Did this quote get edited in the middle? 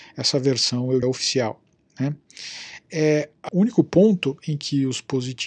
yes; 2 cuts; at 1.0 s, 3.5 s

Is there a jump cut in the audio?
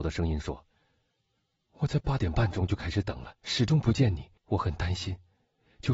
yes; 2 cuts; at 3.4 s, 4.4 s

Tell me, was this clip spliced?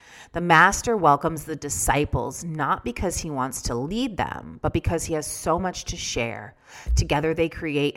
no; 0 cuts

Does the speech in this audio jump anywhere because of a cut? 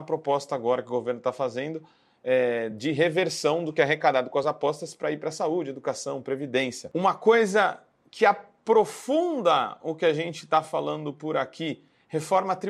no; 0 cuts

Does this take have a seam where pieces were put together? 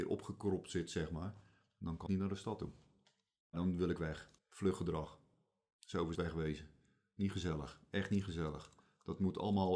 yes; 3 cuts; at 2.1 s, 4.4 s, 6.1 s

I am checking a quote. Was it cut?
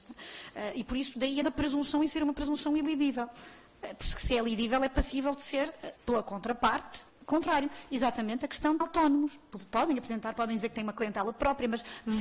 yes; 4 cuts; at 1.4 s, 6.0 s, 7.1 s, 8.8 s

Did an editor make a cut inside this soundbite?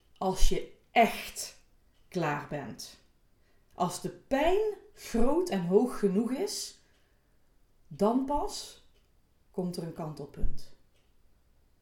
no; 0 cuts

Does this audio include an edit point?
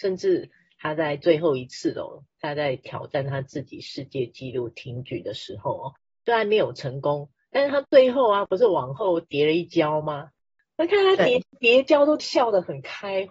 no; 0 cuts

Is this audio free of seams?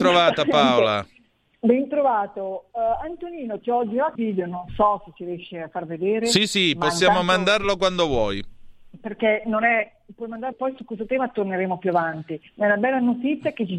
no; 3 cuts; at 4.2 s, 10.5 s, 12.5 s

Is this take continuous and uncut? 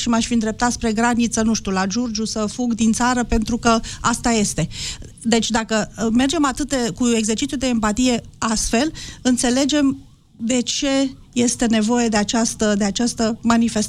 yes; 0 cuts

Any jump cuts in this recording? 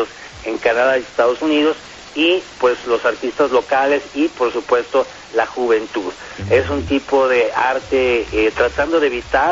no; 0 cuts

